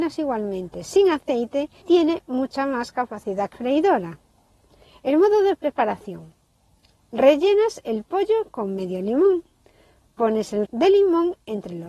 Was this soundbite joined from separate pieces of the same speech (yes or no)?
yes